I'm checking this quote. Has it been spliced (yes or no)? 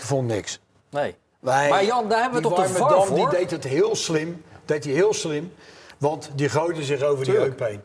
no